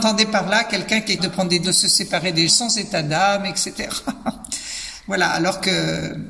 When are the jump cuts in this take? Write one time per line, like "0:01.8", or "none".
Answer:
0:01.2
0:01.6
0:02.5